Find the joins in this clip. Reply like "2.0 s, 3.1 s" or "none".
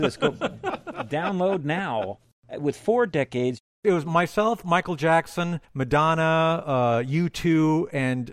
5.6 s

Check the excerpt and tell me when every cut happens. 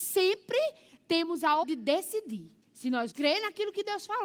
1.6 s, 2.6 s, 3.1 s

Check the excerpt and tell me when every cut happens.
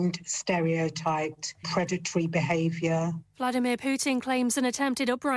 1.6 s

